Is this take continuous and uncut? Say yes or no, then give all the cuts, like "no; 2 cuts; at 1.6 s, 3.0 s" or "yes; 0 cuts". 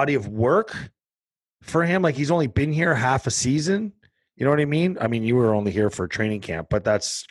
yes; 0 cuts